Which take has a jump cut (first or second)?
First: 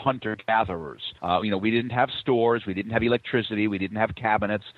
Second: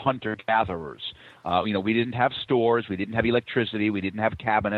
first